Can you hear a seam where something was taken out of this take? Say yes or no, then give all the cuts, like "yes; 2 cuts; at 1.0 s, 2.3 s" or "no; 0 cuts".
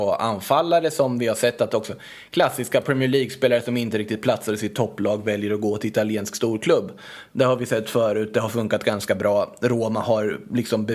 no; 0 cuts